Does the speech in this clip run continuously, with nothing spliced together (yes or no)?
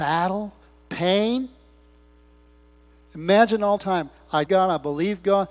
no